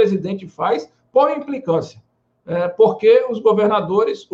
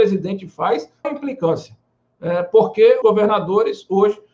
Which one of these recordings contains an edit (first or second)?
second